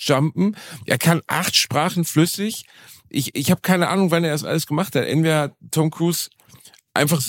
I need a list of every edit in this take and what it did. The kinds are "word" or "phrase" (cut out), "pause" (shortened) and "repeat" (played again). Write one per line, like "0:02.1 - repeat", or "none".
none